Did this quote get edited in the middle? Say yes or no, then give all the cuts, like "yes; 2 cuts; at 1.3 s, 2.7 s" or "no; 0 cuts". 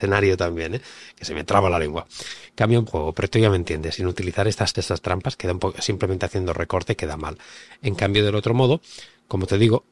yes; 2 cuts; at 2.9 s, 4.7 s